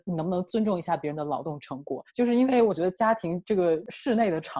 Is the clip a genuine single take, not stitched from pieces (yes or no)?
no